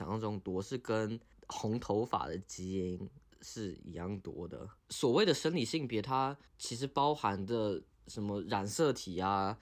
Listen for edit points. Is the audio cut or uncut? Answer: cut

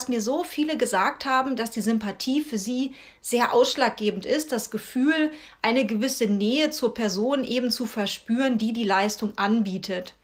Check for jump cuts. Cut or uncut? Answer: uncut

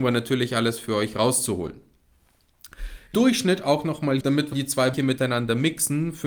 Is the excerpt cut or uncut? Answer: cut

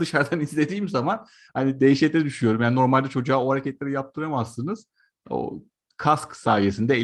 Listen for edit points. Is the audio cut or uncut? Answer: uncut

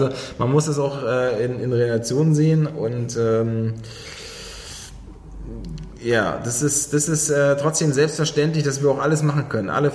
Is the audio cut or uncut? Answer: uncut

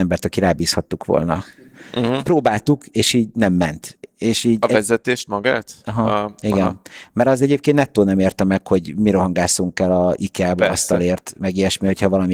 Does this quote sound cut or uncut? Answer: uncut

